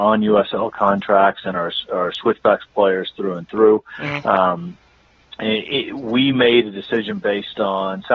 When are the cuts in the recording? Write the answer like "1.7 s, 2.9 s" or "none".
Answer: none

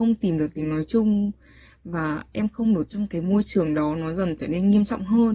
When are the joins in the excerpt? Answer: 2.9 s

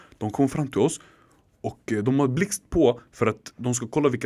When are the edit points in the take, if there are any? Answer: none

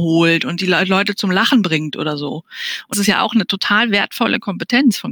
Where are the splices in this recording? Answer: 2.9 s

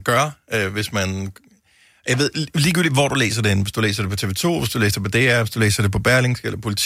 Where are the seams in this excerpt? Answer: none

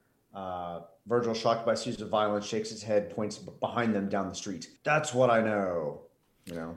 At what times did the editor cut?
4.8 s

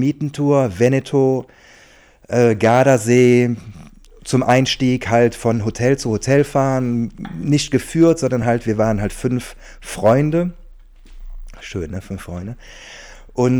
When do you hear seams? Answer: none

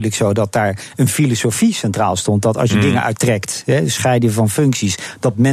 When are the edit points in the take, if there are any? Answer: 3.1 s

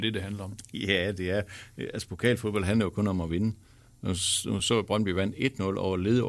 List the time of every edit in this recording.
none

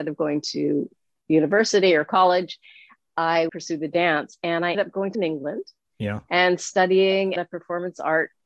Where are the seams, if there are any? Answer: 3.5 s, 4.7 s, 5.1 s, 7.4 s

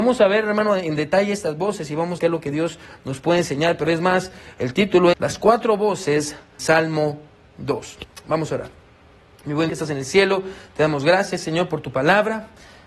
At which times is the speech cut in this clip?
2.2 s, 3.8 s, 5.1 s, 6.6 s, 9.7 s

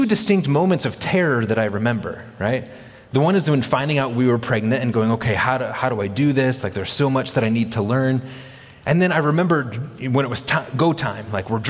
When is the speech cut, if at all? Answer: none

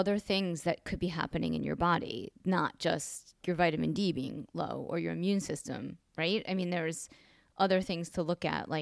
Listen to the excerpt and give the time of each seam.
3.4 s

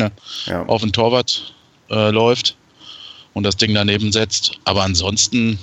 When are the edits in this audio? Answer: none

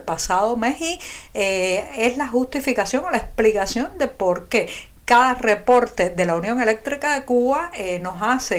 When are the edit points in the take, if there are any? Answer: none

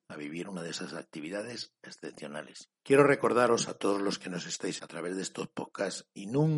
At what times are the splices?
4.8 s

